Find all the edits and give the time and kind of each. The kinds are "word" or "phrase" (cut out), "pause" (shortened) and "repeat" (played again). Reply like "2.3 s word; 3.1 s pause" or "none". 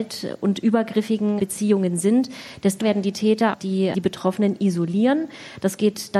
1.4 s word; 2.8 s word; 3.5 s word; 3.9 s word